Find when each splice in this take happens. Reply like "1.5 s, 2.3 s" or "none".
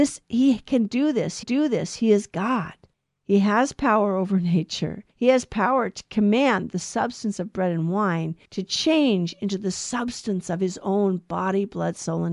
1.4 s, 2.9 s, 5.1 s, 8.4 s